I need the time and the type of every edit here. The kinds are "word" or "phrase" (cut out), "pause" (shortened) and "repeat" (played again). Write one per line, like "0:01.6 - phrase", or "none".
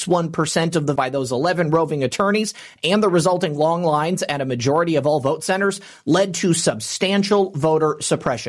0:01.0 - phrase